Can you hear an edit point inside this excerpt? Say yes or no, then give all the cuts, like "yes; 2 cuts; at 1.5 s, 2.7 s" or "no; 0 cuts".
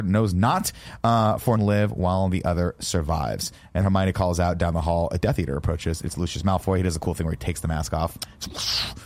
yes; 2 cuts; at 1.6 s, 3.8 s